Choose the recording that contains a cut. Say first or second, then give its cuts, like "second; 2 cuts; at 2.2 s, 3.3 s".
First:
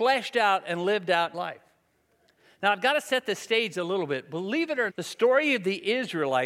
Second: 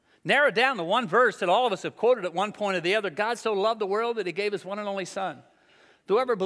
first; 2 cuts; at 1.3 s, 4.9 s